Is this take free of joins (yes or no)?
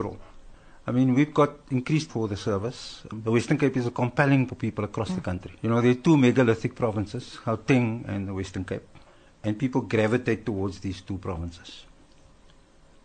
no